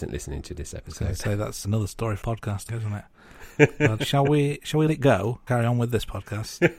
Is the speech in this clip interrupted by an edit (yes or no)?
yes